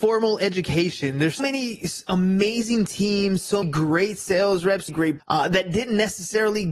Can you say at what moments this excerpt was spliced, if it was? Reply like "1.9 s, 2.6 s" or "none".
1.4 s, 3.6 s, 4.9 s, 5.2 s